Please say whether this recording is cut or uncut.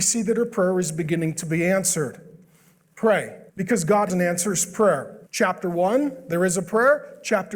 cut